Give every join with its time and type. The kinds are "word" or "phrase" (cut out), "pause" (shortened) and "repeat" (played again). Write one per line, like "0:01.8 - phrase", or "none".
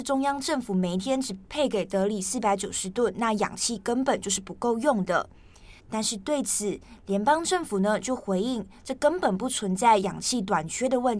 0:05.8 - pause